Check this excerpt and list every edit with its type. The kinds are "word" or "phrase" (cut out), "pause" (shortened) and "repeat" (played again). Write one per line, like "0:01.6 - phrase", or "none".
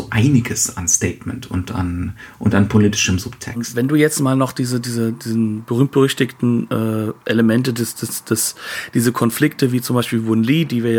none